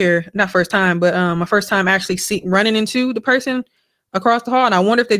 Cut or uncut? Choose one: uncut